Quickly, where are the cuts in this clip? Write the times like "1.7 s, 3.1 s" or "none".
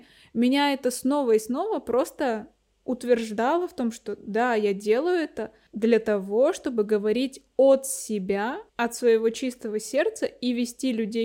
8.7 s